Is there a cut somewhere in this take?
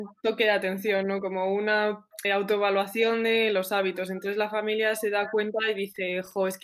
yes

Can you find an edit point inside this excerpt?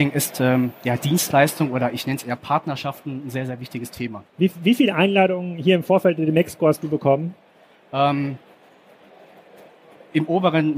yes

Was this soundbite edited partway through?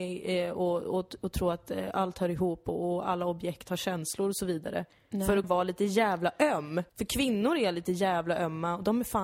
yes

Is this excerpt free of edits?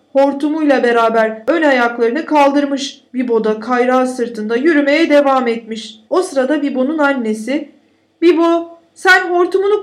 no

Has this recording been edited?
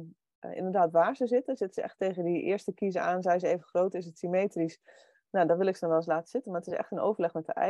no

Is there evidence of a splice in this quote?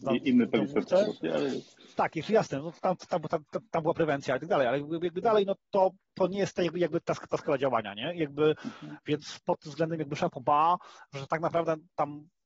no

